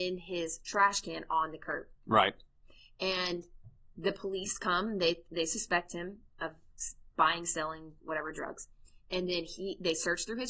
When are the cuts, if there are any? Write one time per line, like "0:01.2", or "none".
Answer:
none